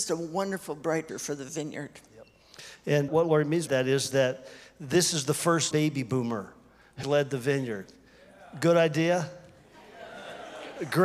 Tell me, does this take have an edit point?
yes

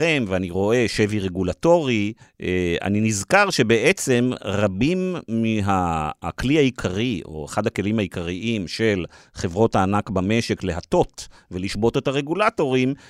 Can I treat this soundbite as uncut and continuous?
no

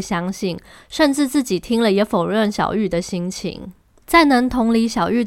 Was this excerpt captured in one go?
yes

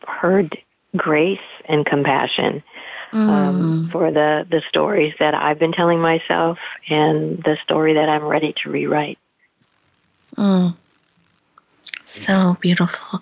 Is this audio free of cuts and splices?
yes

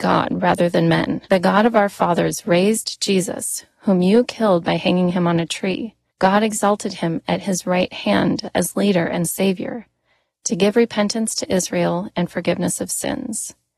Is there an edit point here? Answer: yes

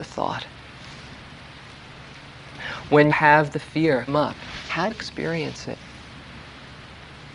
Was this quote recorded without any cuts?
no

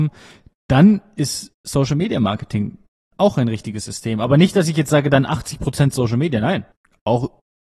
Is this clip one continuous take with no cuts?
yes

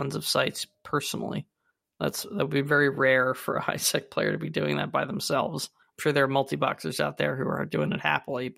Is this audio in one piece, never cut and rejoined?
yes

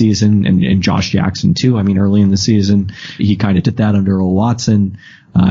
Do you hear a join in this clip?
yes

